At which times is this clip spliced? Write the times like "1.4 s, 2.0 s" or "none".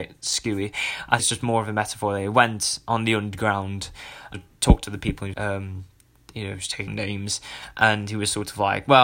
1.2 s, 4.3 s, 5.3 s, 6.9 s